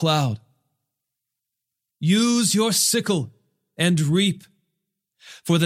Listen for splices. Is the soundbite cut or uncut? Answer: uncut